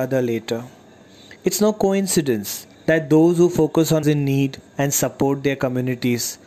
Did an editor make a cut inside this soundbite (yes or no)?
yes